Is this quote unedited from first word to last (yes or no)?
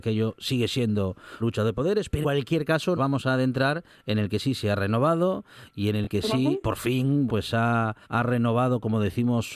no